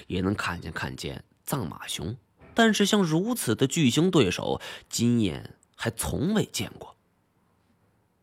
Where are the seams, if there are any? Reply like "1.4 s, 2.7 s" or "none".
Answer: 2.4 s